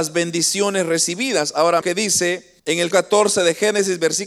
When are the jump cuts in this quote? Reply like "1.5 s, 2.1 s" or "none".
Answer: 1.8 s, 2.6 s, 2.9 s